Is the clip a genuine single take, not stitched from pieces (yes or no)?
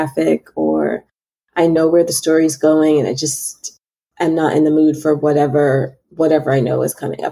yes